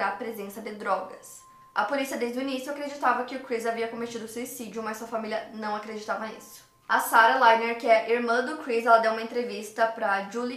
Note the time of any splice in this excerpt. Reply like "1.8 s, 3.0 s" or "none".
none